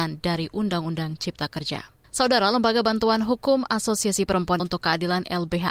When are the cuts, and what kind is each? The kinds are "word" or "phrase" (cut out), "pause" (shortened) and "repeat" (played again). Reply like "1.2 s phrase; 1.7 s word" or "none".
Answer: 2.0 s pause; 4.6 s word

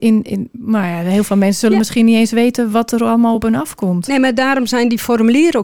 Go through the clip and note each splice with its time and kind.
none

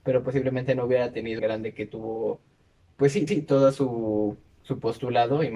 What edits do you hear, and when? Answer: 1.4 s phrase; 2.8 s pause; 3.3 s repeat

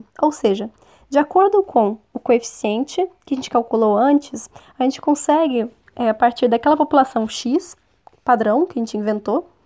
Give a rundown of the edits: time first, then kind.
none

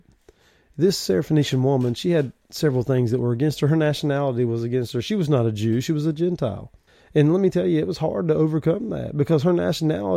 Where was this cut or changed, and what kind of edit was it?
6.9 s pause

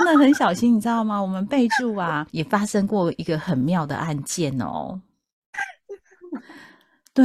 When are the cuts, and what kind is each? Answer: 2.3 s pause

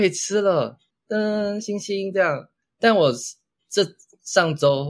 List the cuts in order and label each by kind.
none

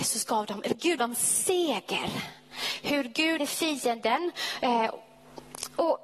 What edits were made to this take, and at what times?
1.0 s word; 3.4 s word

